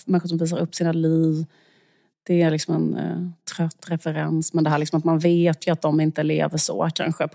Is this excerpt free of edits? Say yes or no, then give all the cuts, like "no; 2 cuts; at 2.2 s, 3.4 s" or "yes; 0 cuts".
yes; 0 cuts